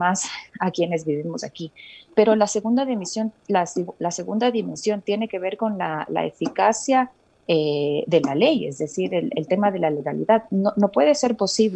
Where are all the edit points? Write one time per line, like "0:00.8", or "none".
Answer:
none